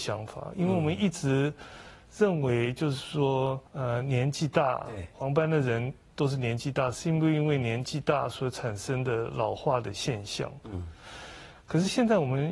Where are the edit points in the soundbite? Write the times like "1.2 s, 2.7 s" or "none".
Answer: 3.7 s